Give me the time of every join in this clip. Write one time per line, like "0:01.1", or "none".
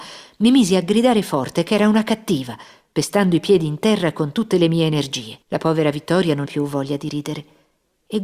0:05.4
0:06.4

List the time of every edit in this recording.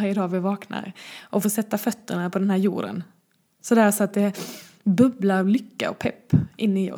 none

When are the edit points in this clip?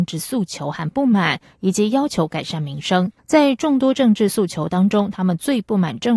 0:03.2

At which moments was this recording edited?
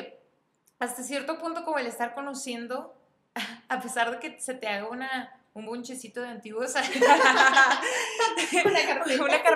none

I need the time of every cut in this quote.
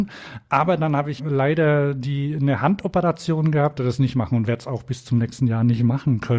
0:01.2
0:03.8

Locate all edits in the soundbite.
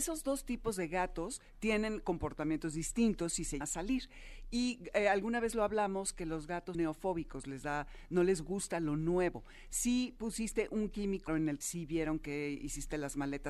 0:03.6
0:06.7
0:11.3
0:11.6

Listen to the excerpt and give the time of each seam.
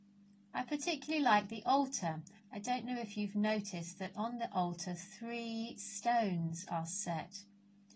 0:02.4

